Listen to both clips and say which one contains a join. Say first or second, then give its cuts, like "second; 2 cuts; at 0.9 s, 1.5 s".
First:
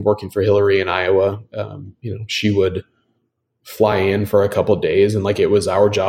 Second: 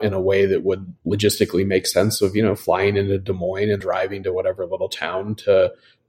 second; 2 cuts; at 1.0 s, 3.8 s